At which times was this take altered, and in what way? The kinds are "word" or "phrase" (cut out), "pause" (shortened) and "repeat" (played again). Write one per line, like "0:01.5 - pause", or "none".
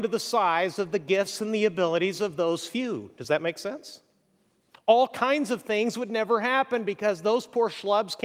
none